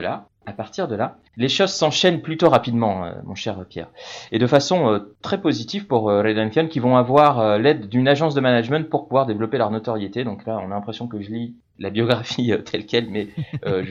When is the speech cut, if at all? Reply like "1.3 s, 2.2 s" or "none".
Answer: 1.3 s